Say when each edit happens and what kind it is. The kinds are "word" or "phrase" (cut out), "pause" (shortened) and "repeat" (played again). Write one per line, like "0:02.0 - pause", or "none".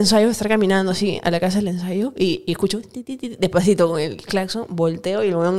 none